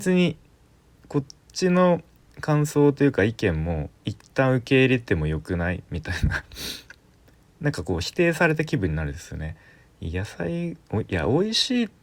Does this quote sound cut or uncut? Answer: cut